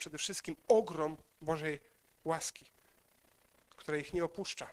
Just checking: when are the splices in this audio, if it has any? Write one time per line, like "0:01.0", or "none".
none